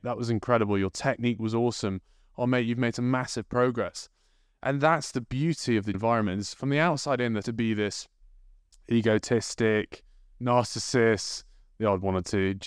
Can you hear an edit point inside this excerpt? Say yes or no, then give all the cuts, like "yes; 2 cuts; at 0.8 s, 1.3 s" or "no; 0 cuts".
yes; 2 cuts; at 5.9 s, 7.4 s